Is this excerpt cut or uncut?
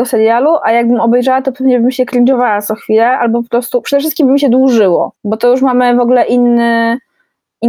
cut